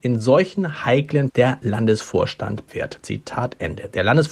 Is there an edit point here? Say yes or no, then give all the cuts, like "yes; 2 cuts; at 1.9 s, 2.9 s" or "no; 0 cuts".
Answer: yes; 2 cuts; at 1.3 s, 2.7 s